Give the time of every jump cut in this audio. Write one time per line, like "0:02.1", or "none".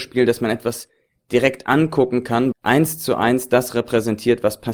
0:02.5